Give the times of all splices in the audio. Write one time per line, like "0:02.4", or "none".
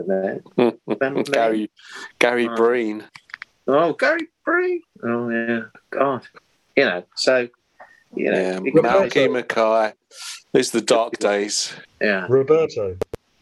0:11.8